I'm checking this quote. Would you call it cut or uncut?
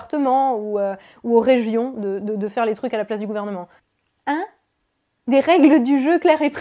uncut